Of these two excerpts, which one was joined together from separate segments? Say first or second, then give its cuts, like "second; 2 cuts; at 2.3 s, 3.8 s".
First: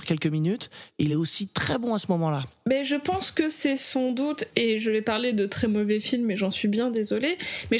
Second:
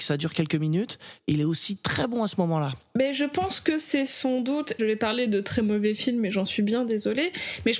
second; 1 cut; at 4.8 s